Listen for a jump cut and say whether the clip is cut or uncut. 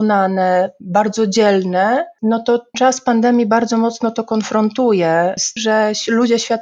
cut